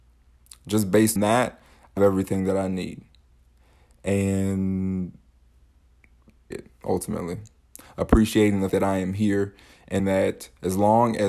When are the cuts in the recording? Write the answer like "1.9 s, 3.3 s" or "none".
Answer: 1.2 s, 2.0 s, 6.5 s, 8.7 s, 10.0 s